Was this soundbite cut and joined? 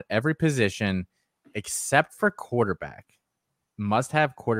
no; 0 cuts

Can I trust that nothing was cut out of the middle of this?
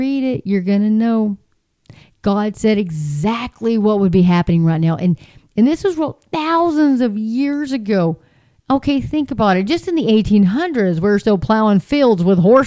yes; 0 cuts

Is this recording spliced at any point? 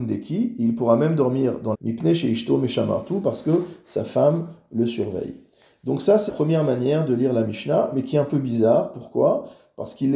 yes; 2 cuts; at 1.7 s, 6.3 s

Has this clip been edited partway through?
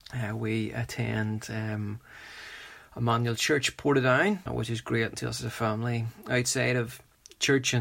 yes; 2 cuts; at 4.5 s, 5.1 s

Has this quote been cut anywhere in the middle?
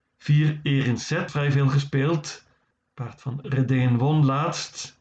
yes; 2 cuts; at 1.3 s, 3.4 s

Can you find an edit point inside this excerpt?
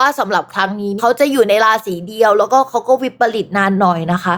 no; 0 cuts

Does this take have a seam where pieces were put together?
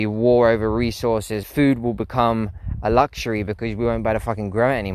yes; 1 cut; at 1.4 s

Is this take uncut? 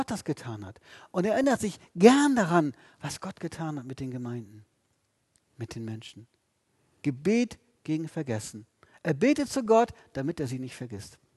yes; 0 cuts

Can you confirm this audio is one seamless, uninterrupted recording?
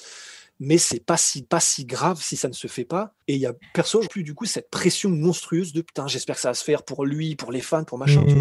no; 3 cuts; at 1.4 s, 3.2 s, 4.1 s

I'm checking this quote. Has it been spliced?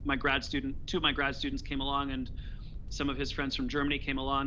no; 0 cuts

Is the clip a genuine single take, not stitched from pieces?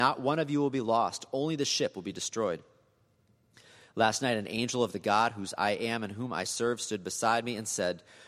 yes; 0 cuts

